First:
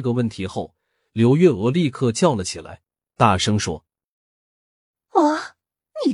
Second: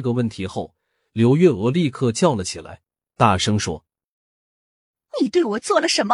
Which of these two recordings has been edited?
second; 1 cut; at 5.1 s

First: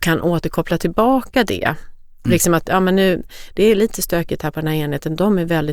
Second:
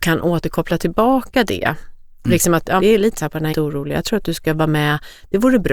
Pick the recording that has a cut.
second; 3 cuts; at 2.8 s, 3.2 s, 3.5 s

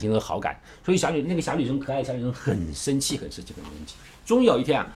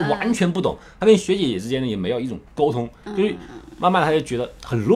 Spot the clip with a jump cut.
second; 1 cut; at 2.5 s

